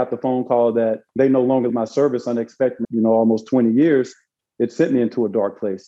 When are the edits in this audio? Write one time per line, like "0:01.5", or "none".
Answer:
0:01.1
0:01.7
0:02.8